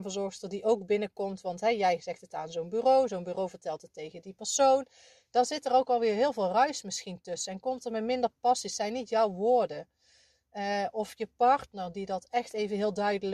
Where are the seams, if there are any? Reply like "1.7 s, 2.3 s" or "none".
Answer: none